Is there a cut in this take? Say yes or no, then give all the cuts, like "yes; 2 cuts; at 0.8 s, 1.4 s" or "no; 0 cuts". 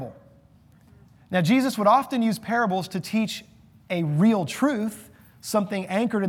no; 0 cuts